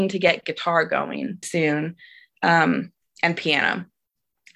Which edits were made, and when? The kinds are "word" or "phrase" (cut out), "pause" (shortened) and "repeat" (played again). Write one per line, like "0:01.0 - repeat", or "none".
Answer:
0:01.4 - word